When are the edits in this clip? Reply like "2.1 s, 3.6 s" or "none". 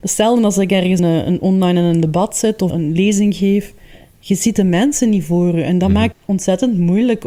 1.0 s, 2.7 s, 6.1 s